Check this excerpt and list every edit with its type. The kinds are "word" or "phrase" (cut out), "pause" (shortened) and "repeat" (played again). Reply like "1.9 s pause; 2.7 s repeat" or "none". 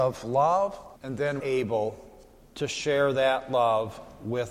1.0 s pause; 1.4 s word